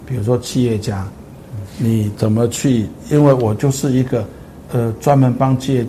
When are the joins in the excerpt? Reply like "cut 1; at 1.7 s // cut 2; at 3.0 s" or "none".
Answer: none